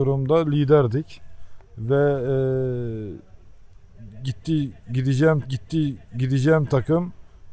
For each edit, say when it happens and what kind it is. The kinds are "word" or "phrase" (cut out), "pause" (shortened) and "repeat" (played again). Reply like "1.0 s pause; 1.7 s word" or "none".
5.4 s repeat